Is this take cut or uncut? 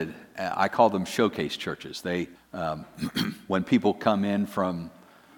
cut